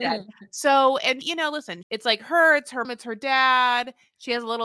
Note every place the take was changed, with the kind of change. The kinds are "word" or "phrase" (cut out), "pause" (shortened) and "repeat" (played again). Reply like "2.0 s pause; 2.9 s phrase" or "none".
1.2 s word; 1.8 s word; 2.8 s word